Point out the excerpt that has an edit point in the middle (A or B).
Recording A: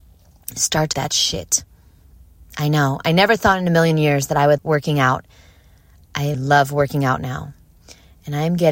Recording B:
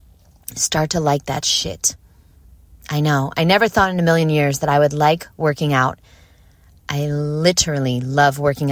A